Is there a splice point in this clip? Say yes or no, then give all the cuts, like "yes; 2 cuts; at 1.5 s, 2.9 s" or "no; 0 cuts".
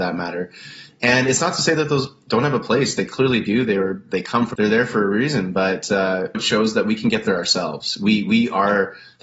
yes; 3 cuts; at 4.1 s, 4.5 s, 6.3 s